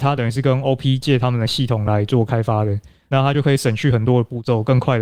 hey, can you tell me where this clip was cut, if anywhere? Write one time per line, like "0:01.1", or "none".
none